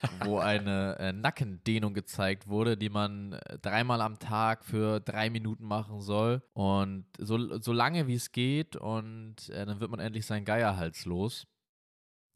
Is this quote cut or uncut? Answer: cut